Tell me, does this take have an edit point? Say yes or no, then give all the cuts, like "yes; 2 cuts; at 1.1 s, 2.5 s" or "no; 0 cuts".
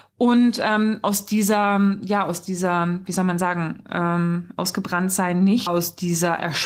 yes; 1 cut; at 5.7 s